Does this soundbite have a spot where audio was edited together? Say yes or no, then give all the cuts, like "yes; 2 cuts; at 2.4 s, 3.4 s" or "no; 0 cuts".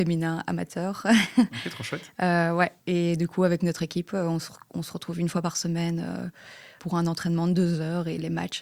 no; 0 cuts